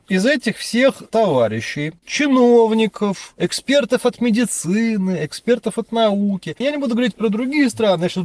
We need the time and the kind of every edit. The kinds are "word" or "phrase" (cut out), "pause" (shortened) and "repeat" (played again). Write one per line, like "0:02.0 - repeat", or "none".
0:06.6 - word

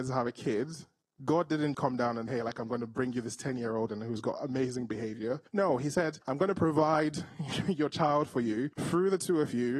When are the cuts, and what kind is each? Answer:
0:01.7 - word
0:02.3 - word
0:03.9 - phrase
0:05.5 - pause
0:06.2 - pause
0:08.7 - pause

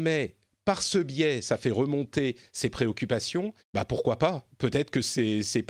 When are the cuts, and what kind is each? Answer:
0:03.6 - pause

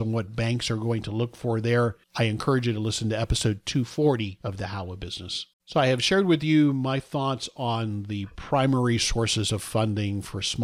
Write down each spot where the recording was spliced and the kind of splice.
0:02.0 - pause
0:05.5 - pause

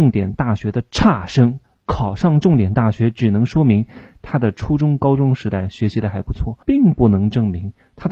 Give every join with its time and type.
0:01.6 - pause
0:06.6 - pause

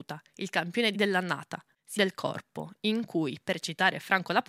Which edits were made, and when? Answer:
0:00.9 - word
0:02.0 - phrase

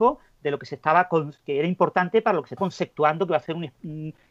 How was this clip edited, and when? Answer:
0:02.6 - word

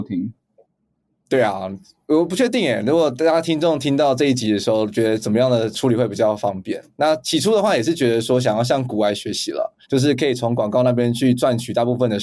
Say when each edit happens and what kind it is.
0:09.8 - pause

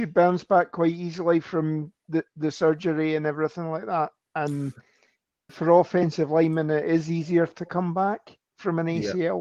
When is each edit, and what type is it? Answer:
0:02.0 - pause
0:05.5 - word

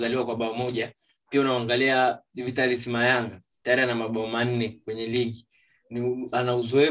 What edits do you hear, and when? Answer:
none

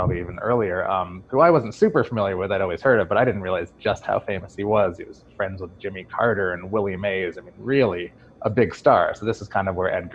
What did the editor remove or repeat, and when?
0:08.2 - pause

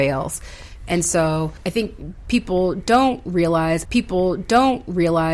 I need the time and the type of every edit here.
0:01.6 - pause
0:03.9 - repeat

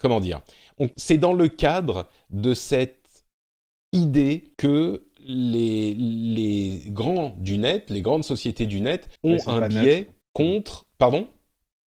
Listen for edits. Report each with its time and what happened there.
0:00.9 - pause
0:04.5 - pause
0:09.2 - pause
0:10.2 - pause

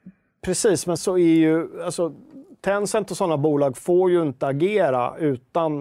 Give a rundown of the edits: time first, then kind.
0:01.0 - word

